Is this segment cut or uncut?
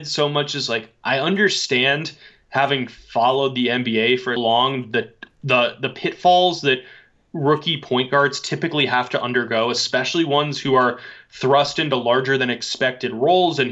cut